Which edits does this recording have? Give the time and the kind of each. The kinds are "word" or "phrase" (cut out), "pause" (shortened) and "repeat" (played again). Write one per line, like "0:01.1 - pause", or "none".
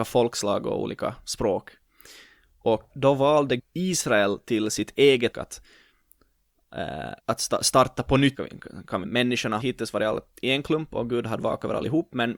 0:02.9 - word
0:03.6 - word
0:05.3 - word
0:07.2 - pause
0:08.3 - word
0:09.0 - phrase
0:09.6 - word